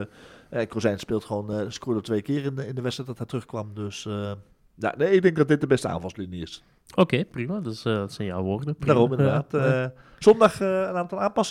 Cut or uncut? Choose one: uncut